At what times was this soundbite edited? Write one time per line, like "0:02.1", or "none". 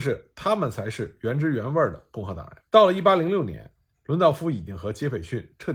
0:02.7